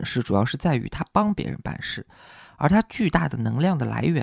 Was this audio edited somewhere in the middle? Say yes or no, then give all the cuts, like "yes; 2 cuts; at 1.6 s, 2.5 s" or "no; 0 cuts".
no; 0 cuts